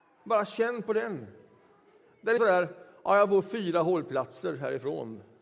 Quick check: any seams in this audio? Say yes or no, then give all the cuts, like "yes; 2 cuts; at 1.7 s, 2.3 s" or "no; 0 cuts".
yes; 1 cut; at 2.4 s